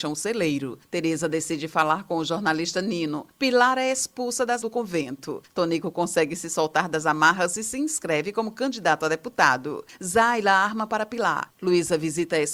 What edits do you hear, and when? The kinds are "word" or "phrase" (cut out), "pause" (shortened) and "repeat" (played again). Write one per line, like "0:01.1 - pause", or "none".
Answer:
0:04.6 - word